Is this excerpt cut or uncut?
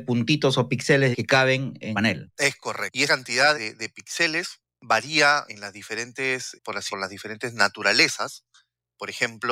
cut